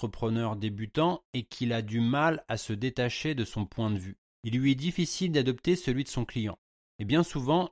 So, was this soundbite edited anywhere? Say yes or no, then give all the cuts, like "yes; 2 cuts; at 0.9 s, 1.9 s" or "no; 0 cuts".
no; 0 cuts